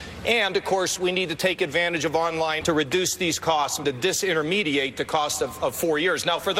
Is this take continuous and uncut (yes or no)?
no